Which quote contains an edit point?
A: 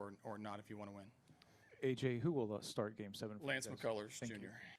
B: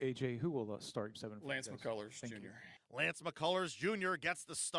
B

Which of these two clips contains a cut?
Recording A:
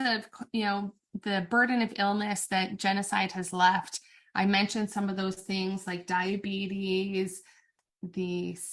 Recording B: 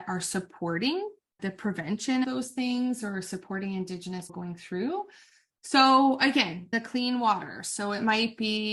B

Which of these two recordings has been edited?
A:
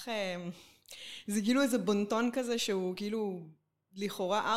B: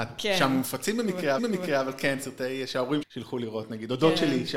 B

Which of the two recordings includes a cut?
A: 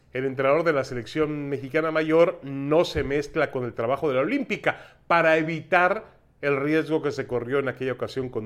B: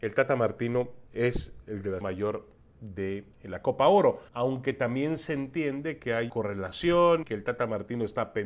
B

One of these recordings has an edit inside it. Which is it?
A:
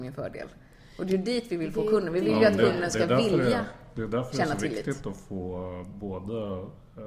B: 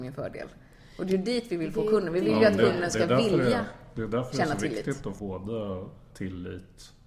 B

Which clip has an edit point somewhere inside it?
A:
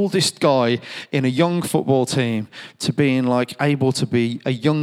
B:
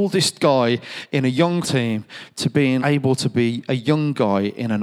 B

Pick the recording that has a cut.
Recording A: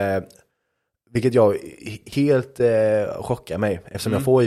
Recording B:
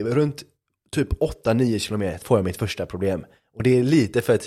B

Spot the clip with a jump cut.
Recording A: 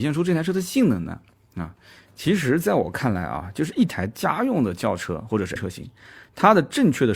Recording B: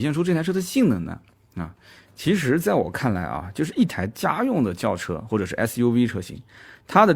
A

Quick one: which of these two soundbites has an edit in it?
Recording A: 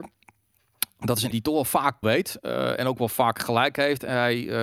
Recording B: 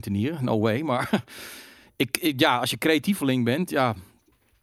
A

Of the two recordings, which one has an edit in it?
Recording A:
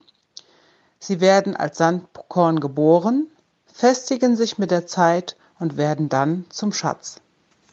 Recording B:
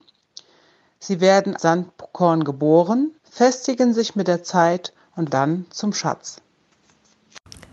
B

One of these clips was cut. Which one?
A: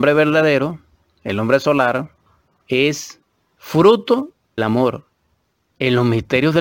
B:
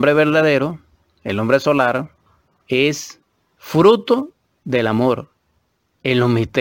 A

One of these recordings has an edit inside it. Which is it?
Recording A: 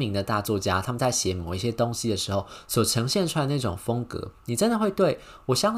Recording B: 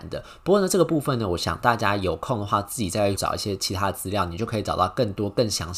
B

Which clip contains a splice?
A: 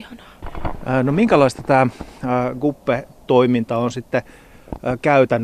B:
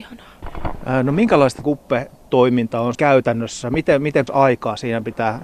B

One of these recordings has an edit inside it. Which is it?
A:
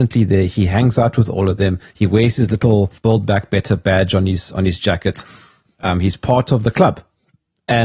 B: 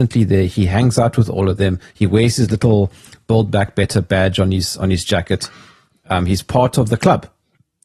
A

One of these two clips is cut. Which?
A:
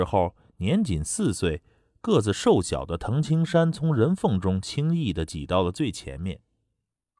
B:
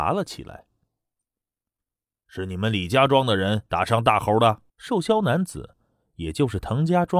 B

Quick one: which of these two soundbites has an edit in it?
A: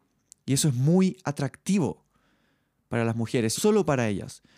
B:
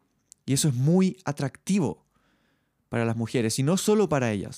A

